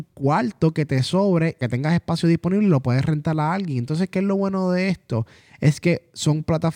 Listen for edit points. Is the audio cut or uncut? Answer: uncut